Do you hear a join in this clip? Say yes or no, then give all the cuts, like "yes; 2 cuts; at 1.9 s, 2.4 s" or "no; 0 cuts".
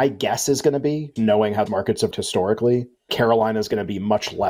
yes; 4 cuts; at 1.2 s, 1.7 s, 2.1 s, 3.1 s